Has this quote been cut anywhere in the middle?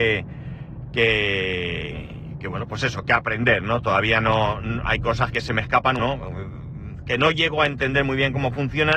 yes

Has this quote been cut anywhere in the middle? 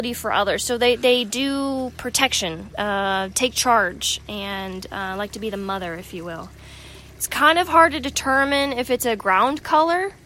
no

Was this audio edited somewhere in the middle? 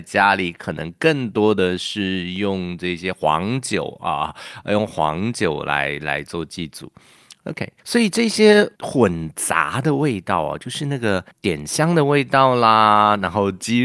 yes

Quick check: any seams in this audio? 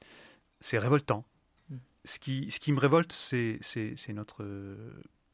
no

